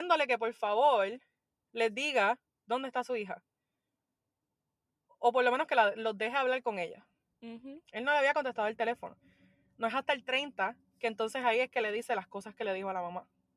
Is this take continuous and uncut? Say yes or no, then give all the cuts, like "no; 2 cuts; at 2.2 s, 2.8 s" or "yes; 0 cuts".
yes; 0 cuts